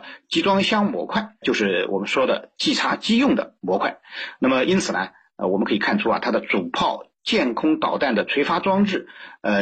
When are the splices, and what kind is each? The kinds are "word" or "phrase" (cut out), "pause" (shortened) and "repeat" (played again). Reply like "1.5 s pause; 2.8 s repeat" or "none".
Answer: 1.4 s word